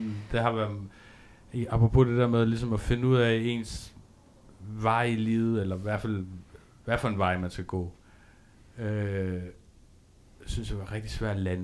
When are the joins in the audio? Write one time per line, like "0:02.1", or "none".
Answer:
none